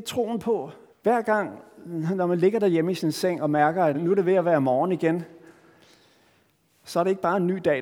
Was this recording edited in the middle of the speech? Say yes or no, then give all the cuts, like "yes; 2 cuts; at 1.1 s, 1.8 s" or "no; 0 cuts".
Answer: yes; 2 cuts; at 0.9 s, 3.9 s